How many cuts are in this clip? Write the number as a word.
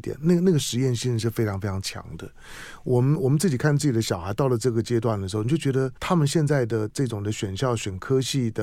one